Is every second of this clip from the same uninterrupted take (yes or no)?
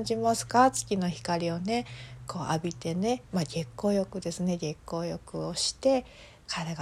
no